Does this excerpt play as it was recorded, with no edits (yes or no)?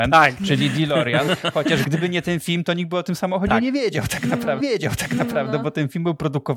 no